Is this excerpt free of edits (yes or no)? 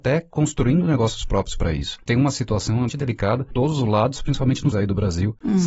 no